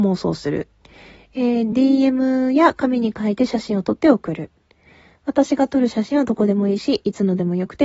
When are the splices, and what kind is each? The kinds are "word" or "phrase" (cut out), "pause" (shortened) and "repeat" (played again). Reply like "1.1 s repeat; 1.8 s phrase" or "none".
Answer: none